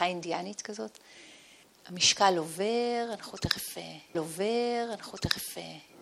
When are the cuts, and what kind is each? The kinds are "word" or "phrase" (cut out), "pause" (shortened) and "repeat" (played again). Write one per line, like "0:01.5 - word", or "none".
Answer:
0:01.6 - pause
0:04.1 - repeat